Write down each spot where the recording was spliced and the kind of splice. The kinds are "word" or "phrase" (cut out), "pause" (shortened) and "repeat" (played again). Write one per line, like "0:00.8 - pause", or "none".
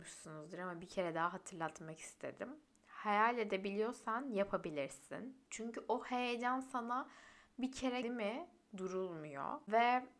0:05.5 - pause
0:08.0 - word